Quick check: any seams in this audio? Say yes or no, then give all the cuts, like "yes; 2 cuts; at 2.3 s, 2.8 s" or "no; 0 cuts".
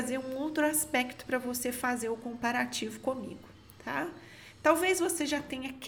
no; 0 cuts